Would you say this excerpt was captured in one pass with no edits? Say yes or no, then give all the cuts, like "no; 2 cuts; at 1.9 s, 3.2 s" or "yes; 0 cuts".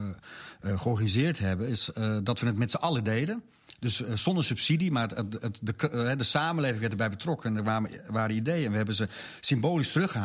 yes; 0 cuts